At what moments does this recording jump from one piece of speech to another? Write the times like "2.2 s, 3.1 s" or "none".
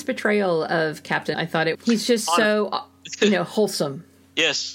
1.3 s, 1.7 s